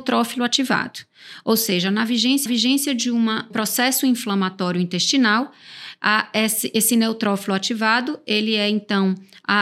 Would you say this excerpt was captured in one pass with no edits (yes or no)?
no